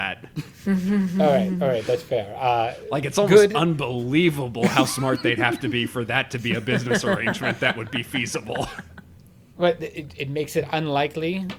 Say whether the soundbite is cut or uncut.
uncut